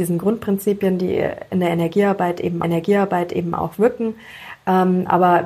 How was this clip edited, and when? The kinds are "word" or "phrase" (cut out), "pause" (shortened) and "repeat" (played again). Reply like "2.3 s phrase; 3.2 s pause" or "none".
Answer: 2.6 s repeat